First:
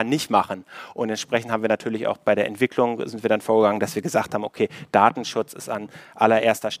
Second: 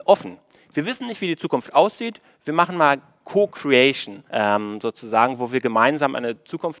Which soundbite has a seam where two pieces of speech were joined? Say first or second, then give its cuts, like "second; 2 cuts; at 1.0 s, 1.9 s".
second; 1 cut; at 4.3 s